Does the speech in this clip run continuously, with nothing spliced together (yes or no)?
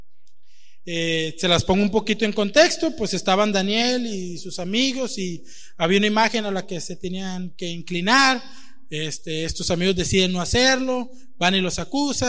yes